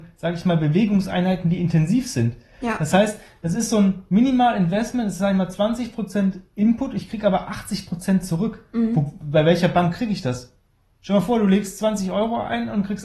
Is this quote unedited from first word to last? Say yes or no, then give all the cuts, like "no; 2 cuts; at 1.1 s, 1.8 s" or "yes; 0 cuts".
yes; 0 cuts